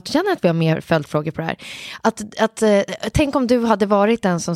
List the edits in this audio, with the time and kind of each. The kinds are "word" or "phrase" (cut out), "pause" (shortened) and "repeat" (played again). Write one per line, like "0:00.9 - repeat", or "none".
none